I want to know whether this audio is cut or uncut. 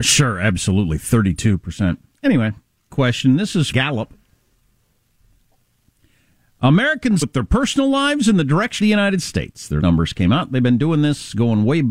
cut